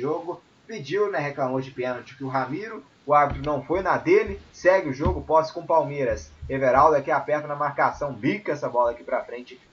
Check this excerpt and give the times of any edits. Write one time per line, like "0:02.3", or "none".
none

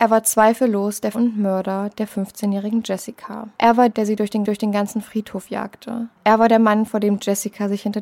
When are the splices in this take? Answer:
0:01.1
0:03.5
0:03.9
0:04.4
0:06.2

